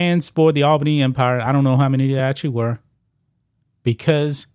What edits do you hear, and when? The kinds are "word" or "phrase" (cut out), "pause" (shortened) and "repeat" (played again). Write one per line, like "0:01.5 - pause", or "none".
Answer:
none